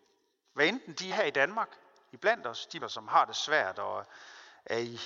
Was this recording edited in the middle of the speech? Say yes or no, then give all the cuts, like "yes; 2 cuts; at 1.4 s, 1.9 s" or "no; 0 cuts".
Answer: yes; 2 cuts; at 1.1 s, 2.8 s